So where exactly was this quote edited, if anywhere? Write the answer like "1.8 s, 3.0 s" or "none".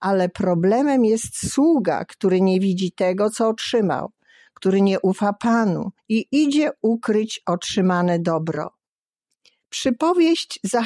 6.0 s